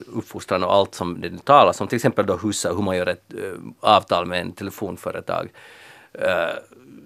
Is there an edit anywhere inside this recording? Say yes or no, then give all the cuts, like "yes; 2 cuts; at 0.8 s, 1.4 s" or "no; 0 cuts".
no; 0 cuts